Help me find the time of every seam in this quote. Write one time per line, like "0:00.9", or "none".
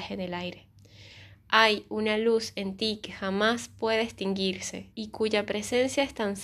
0:04.9